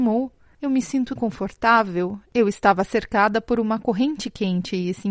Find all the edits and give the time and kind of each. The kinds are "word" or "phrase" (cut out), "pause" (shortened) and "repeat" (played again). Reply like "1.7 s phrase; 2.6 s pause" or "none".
1.2 s word